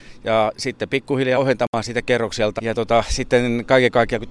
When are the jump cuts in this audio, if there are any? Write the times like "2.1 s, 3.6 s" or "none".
1.4 s, 2.0 s, 2.6 s